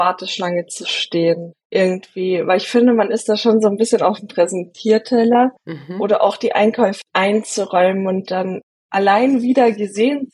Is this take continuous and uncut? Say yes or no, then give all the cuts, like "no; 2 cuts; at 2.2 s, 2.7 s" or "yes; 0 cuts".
yes; 0 cuts